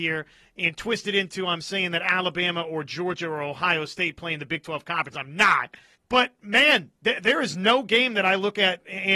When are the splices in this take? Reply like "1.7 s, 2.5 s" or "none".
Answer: 6.0 s